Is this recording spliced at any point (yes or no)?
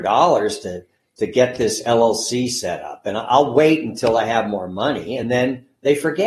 no